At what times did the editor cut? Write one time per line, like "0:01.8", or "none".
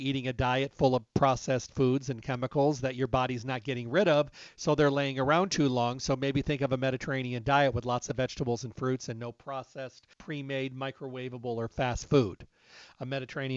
0:10.1